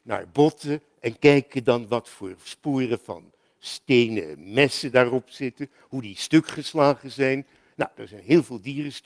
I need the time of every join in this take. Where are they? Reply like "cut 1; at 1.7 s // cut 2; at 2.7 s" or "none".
none